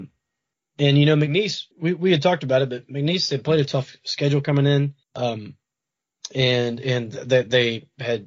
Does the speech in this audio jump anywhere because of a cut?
yes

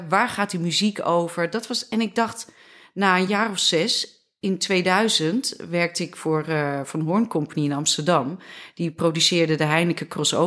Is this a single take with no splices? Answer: yes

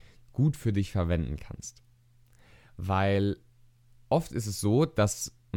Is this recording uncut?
yes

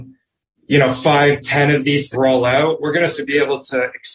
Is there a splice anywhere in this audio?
yes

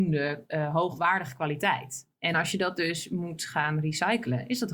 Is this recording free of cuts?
yes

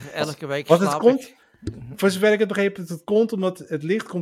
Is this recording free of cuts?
yes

